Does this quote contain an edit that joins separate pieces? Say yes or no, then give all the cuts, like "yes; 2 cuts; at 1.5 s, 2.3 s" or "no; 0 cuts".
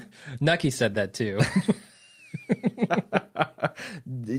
no; 0 cuts